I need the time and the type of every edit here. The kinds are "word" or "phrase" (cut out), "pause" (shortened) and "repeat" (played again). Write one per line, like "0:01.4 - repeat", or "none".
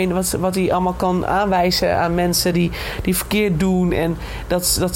none